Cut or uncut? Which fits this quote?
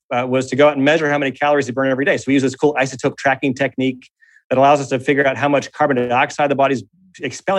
uncut